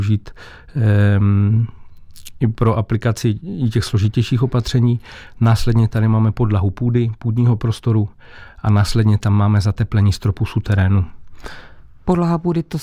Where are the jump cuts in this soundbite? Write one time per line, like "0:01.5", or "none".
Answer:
none